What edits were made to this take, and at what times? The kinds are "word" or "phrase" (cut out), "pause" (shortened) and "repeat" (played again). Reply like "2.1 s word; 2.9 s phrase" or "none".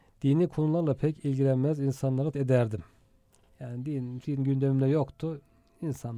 2.3 s word; 4.2 s word

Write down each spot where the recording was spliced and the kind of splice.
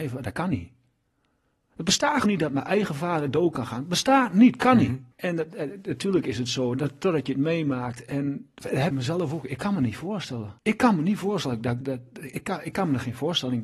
2.2 s word; 5.1 s pause; 8.9 s phrase; 10.6 s pause; 11.8 s word

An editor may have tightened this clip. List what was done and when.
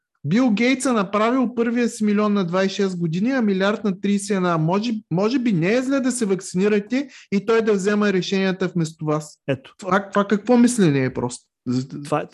9.4 s pause

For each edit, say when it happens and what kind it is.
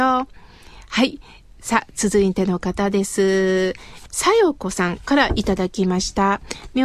none

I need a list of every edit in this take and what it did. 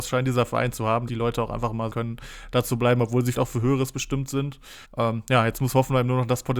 1.1 s word; 1.9 s phrase; 3.3 s word; 4.8 s pause

